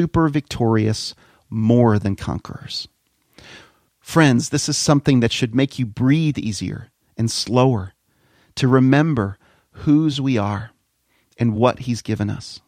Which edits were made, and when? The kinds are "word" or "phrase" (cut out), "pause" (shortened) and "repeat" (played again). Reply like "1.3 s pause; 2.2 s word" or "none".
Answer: none